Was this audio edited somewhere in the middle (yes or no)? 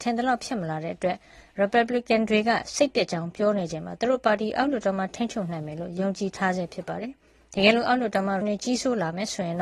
yes